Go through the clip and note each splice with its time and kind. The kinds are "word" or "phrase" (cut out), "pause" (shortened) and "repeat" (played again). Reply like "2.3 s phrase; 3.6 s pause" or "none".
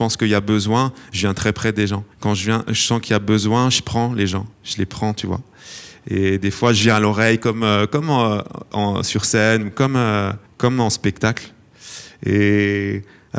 2.1 s pause; 4.5 s pause; 10.5 s pause